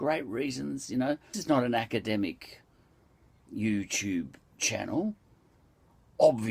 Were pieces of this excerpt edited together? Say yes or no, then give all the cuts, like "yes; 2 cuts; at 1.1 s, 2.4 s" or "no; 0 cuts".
yes; 2 cuts; at 1.3 s, 3.5 s